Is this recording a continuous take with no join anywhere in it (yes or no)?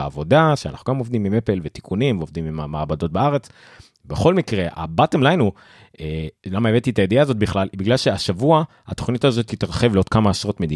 yes